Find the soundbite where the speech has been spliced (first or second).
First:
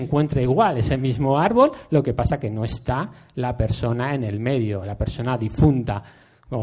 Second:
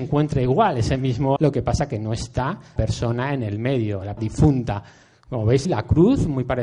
second